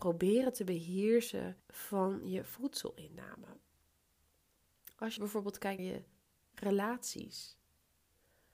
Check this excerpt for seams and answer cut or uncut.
cut